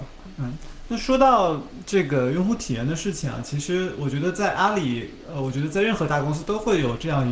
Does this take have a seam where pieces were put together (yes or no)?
no